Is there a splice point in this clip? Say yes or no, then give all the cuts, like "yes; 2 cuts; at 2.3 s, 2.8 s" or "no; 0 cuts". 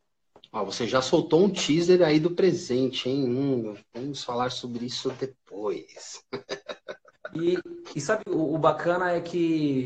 no; 0 cuts